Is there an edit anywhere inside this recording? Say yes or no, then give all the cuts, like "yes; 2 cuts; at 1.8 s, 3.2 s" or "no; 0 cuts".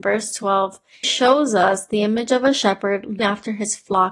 yes; 2 cuts; at 1.0 s, 3.2 s